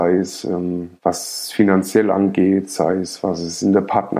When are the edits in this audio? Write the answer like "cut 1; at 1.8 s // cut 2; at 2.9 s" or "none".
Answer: cut 1; at 1.0 s